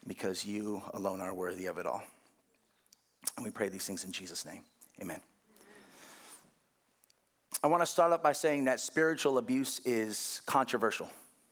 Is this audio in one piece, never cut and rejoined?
yes; 0 cuts

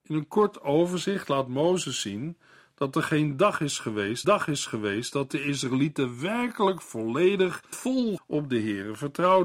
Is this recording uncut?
no; 3 cuts; at 4.2 s, 7.7 s, 8.2 s

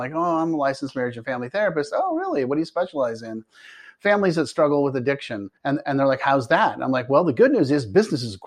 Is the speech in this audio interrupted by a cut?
yes; 1 cut; at 5.6 s

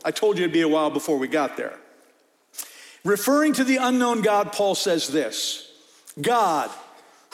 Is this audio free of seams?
yes; 0 cuts

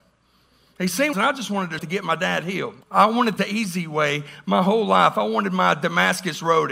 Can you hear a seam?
yes; 4 cuts; at 1.1 s, 1.8 s, 2.8 s, 3.4 s

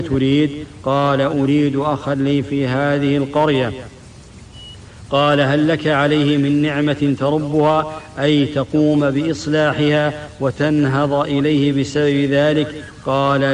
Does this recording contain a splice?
no; 0 cuts

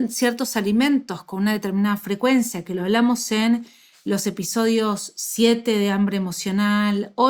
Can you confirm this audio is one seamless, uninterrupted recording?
yes; 0 cuts

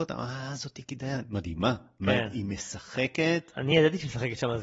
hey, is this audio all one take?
yes; 0 cuts

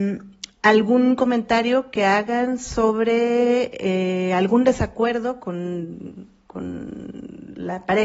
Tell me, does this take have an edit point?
no; 0 cuts

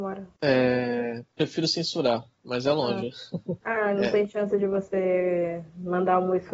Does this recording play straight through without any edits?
yes; 0 cuts

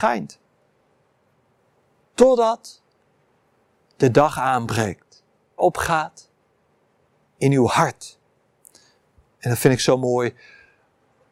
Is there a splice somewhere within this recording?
yes; 1 cut; at 5.6 s

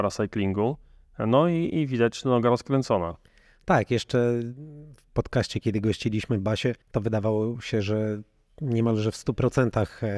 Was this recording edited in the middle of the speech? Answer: yes; 1 cut; at 6.8 s

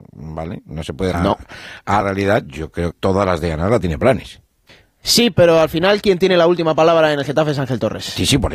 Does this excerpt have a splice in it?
yes; 4 cuts; at 1.1 s, 2.0 s, 2.9 s, 4.7 s

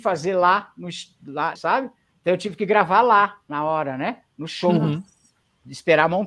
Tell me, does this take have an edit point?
yes; 1 cut; at 1.6 s

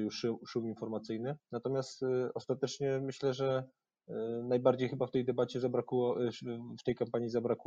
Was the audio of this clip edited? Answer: yes; 1 cut; at 1.4 s

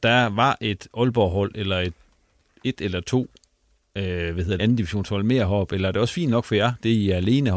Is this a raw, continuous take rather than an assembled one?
no; 1 cut; at 4.6 s

